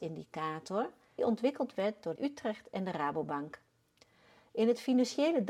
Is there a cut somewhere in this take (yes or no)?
yes